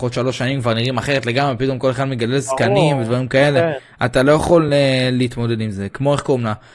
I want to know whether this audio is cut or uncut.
uncut